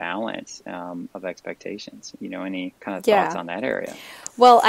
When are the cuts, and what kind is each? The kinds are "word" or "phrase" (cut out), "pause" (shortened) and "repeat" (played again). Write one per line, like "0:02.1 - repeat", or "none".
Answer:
0:02.8 - pause